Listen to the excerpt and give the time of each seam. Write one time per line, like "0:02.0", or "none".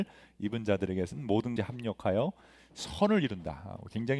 0:01.6